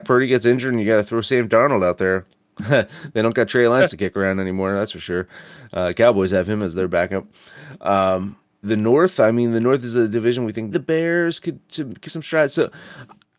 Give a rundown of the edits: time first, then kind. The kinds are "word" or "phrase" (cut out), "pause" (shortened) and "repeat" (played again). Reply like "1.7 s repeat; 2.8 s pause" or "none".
2.3 s pause; 8.6 s word; 10.7 s word; 12.1 s word